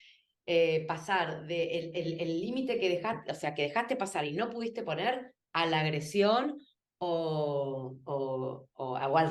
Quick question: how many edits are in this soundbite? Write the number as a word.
zero